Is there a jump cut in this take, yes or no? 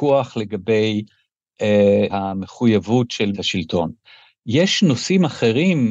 yes